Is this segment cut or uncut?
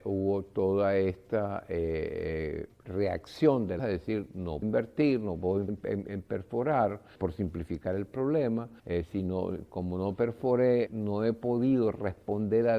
cut